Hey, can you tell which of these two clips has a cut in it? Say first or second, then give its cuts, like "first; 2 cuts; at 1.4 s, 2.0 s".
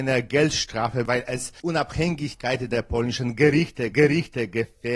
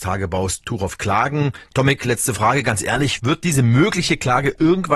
first; 3 cuts; at 1.1 s, 1.6 s, 3.9 s